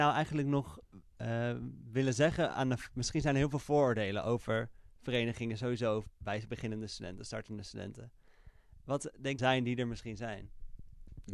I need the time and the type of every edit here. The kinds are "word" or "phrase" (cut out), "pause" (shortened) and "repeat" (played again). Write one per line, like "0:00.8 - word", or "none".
0:09.4 - phrase